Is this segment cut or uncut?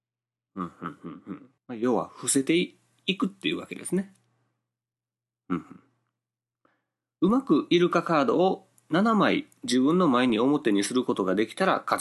cut